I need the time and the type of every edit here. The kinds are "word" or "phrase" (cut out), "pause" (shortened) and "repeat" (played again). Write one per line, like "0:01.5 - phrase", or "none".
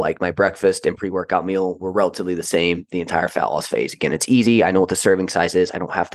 none